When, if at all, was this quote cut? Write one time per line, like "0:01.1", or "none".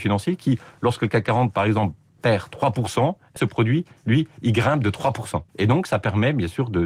0:03.4
0:05.5